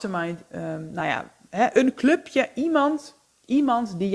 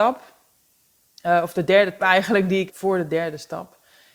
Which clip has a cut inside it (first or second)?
second